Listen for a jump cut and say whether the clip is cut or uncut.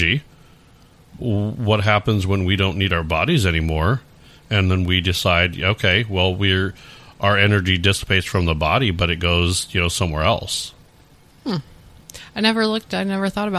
uncut